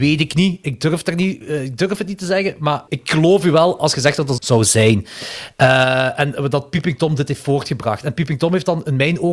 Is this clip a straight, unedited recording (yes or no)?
no